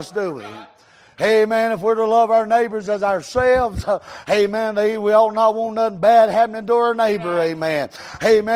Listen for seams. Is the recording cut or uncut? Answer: uncut